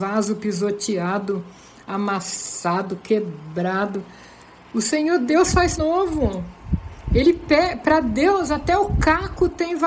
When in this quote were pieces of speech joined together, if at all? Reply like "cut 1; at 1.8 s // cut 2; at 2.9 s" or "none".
cut 1; at 5.8 s